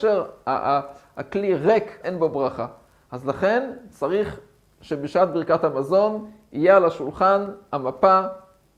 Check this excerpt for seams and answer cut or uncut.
cut